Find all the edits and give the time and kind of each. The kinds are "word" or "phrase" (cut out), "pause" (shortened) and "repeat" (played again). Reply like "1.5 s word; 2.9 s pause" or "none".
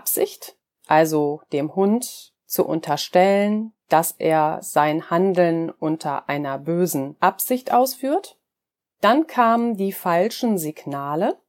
none